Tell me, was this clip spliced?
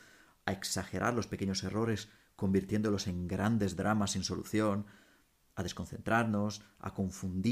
no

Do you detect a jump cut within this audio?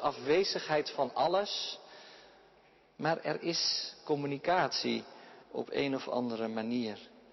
yes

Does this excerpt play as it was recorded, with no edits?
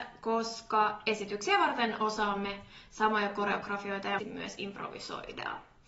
no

